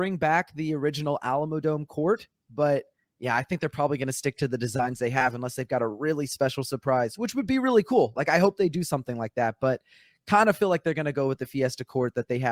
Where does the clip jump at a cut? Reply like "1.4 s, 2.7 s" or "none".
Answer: none